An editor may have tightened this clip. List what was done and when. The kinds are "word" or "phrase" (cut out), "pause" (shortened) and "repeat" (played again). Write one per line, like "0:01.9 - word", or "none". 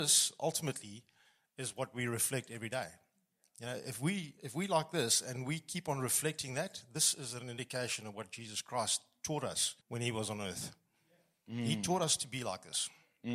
0:09.8 - pause

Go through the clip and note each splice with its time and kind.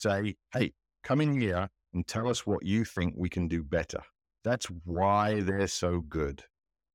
none

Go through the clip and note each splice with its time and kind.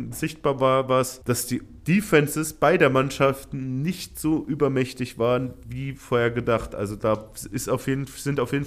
0:01.2 - pause

